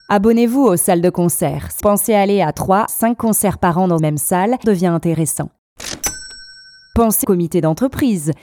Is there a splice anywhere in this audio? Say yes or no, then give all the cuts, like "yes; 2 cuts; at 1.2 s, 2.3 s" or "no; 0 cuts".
yes; 5 cuts; at 1.8 s, 2.9 s, 4.0 s, 4.6 s, 7.2 s